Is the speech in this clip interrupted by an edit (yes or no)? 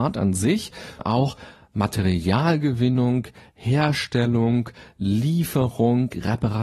yes